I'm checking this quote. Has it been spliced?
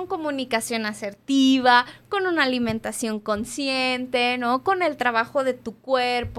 no; 0 cuts

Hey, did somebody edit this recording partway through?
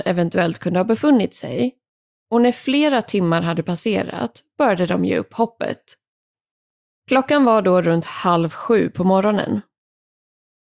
no; 0 cuts

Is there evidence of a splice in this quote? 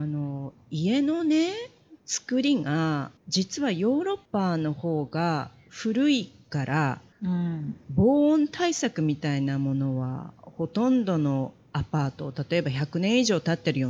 yes; 4 cuts; at 2.0 s, 3.2 s, 4.3 s, 7.1 s

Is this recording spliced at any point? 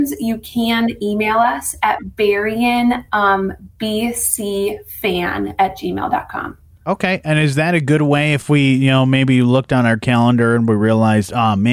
no; 0 cuts

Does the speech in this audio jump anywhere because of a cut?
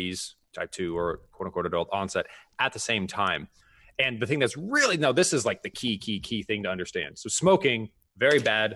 no; 0 cuts

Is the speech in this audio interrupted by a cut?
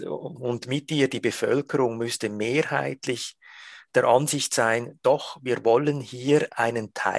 no; 0 cuts

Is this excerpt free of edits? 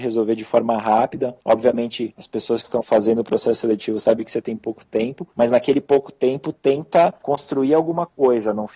yes; 0 cuts

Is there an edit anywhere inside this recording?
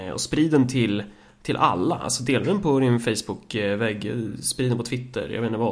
no; 0 cuts

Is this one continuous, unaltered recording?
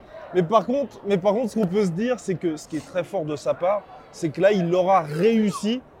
no; 1 cut; at 2.9 s

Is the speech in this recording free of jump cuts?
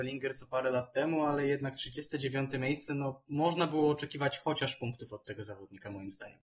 yes; 0 cuts

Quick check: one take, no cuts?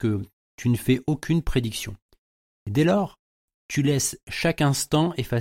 yes; 0 cuts

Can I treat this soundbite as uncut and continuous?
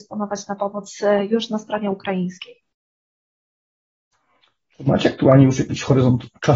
yes; 0 cuts

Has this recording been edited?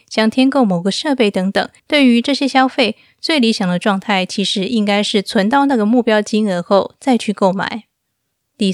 yes; 1 cut; at 1.8 s

